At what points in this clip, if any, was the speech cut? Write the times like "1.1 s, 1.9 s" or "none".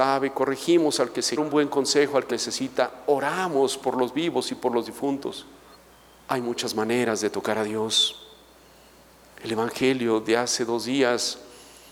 1.4 s, 2.3 s, 5.7 s